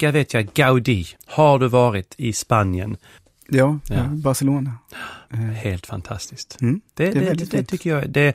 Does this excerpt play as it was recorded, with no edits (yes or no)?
no